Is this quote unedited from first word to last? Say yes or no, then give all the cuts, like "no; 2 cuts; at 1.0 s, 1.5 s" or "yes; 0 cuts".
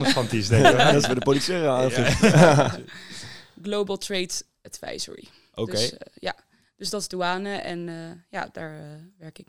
yes; 0 cuts